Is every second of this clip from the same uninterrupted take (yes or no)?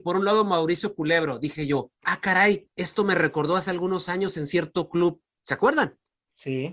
no